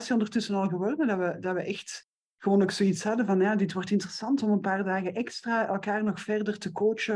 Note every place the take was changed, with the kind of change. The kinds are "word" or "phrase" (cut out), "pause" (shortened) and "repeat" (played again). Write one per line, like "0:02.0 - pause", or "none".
none